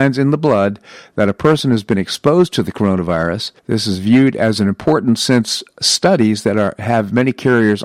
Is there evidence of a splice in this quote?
yes; 1 cut; at 3.6 s

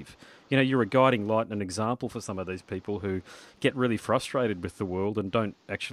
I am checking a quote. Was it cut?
no; 0 cuts

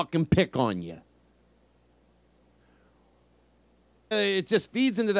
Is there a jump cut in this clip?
yes; 1 cut; at 4.1 s

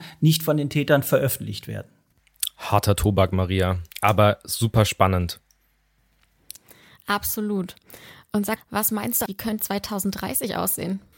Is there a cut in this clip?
yes; 4 cuts; at 3.9 s, 8.6 s, 9.3 s, 9.6 s

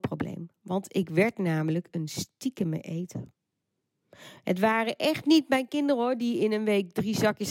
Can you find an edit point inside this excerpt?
no; 0 cuts

